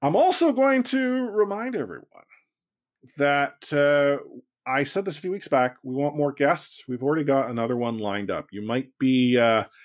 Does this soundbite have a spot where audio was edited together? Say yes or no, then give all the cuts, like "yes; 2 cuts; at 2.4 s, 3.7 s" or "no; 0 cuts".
no; 0 cuts